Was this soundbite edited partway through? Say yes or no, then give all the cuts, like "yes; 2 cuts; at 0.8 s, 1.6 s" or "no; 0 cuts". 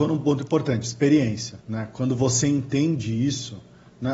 yes; 1 cut; at 1.6 s